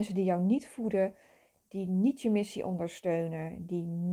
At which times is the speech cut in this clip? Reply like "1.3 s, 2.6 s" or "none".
none